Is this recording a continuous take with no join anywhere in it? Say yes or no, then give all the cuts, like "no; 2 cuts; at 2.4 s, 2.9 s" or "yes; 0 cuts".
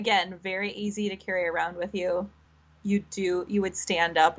yes; 0 cuts